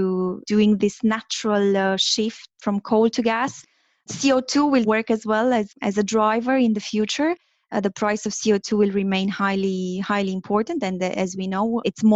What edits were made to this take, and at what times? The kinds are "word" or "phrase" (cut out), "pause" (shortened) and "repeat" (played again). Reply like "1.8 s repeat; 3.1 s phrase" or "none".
none